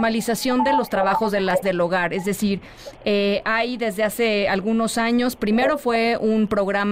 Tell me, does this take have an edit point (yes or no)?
yes